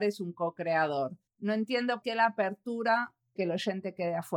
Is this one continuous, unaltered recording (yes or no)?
no